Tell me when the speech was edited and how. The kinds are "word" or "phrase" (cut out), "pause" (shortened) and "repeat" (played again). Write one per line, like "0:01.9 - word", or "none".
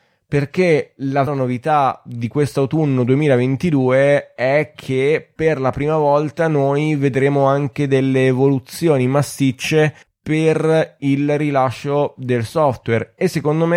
0:01.3 - word
0:10.0 - pause